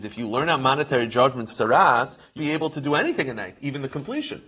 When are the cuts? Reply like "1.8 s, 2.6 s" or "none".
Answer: 1.5 s, 2.4 s